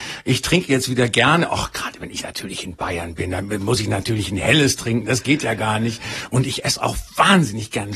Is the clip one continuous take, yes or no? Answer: yes